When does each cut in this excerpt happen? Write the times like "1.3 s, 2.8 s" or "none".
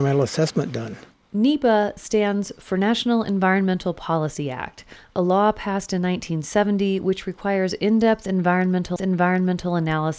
9.0 s